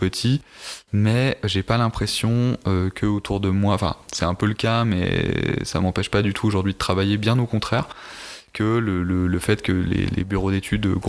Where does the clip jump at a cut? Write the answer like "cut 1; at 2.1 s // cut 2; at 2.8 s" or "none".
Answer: none